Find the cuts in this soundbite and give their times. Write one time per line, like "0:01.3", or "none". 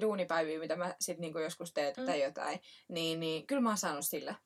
0:01.9